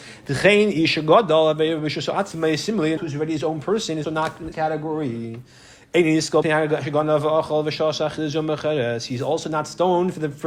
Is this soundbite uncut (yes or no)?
no